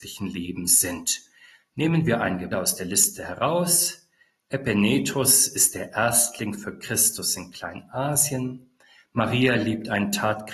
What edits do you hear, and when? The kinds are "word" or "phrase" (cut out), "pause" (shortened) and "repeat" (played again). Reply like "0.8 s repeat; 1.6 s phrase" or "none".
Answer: 2.5 s word